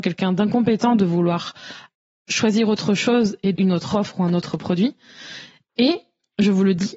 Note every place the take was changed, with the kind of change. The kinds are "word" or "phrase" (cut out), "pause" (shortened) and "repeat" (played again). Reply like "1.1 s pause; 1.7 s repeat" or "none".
3.5 s word